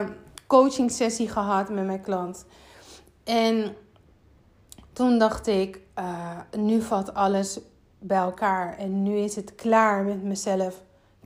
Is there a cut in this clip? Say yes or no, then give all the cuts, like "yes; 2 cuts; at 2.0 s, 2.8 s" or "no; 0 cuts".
no; 0 cuts